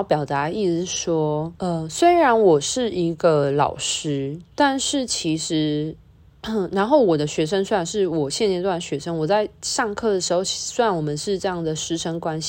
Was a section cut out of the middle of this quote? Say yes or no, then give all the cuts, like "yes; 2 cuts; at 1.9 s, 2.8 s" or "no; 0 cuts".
yes; 1 cut; at 1.6 s